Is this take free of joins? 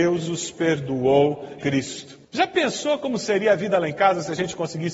no; 1 cut; at 1.6 s

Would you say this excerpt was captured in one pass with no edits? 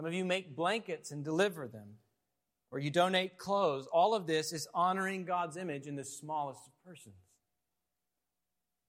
yes; 0 cuts

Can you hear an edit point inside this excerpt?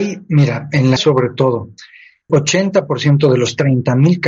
yes; 2 cuts; at 1.0 s, 2.3 s

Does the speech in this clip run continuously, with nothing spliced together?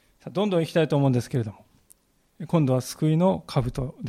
yes; 0 cuts

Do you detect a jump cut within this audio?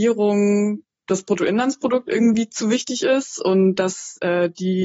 no; 0 cuts

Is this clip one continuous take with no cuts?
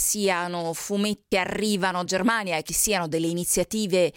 no; 3 cuts; at 1.3 s, 2.1 s, 2.7 s

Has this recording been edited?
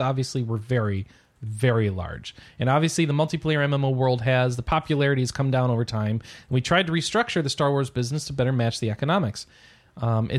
no; 0 cuts

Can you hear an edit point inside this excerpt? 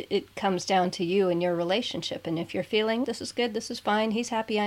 yes; 1 cut; at 3.0 s

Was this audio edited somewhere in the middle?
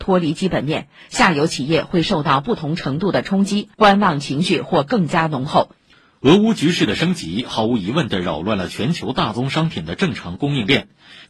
yes; 2 cuts; at 3.7 s, 5.9 s

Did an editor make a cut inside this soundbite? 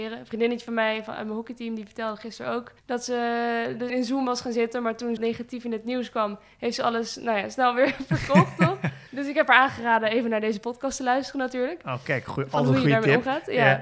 yes; 4 cuts; at 2.8 s, 3.9 s, 5.2 s, 9.1 s

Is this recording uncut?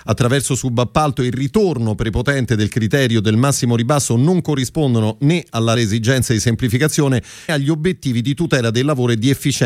no; 2 cuts; at 5.8 s, 7.5 s

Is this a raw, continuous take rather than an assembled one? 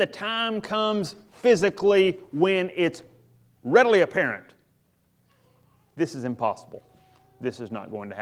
yes; 0 cuts

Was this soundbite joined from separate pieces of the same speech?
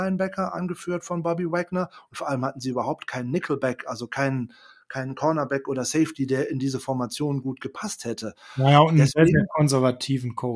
no; 0 cuts

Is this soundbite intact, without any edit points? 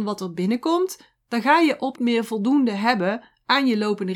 no; 1 cut; at 2.0 s

